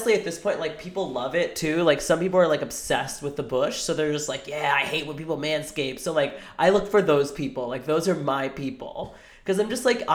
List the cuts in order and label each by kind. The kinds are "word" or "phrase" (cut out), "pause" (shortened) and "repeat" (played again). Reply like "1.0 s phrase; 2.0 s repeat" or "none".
none